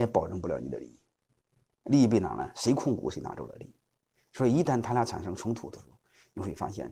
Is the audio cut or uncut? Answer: uncut